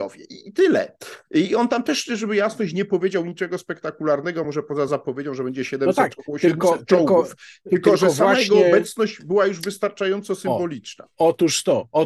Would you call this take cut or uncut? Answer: uncut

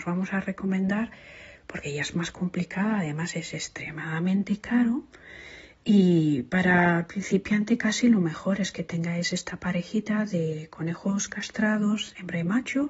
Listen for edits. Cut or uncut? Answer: uncut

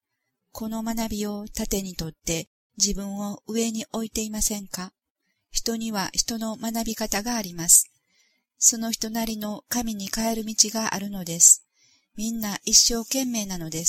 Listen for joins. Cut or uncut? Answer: uncut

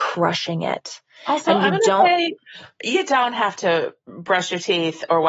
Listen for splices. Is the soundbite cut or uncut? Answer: uncut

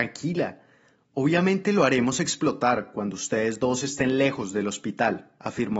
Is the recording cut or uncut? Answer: uncut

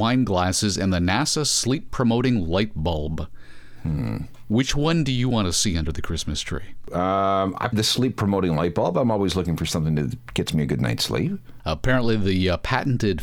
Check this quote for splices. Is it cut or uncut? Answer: cut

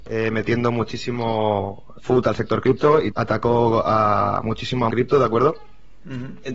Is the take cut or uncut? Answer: cut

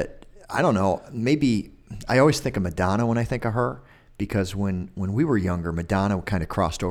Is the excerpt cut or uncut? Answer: uncut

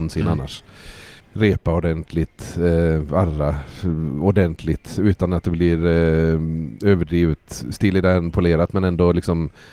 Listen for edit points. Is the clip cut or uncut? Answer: cut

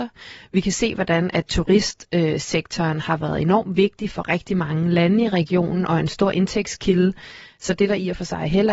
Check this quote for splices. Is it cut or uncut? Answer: uncut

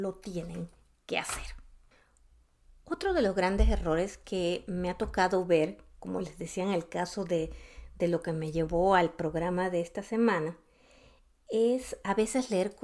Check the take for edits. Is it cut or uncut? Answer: uncut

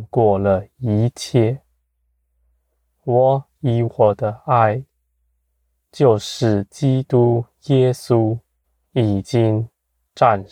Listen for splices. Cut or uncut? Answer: cut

